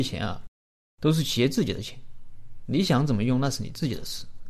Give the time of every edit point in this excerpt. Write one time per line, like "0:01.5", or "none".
none